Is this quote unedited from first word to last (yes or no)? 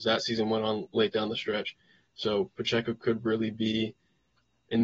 yes